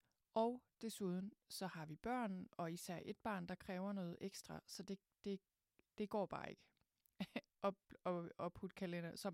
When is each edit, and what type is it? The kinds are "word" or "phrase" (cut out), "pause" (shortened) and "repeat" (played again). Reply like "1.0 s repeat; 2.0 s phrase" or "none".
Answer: none